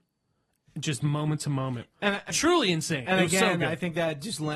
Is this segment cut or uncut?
cut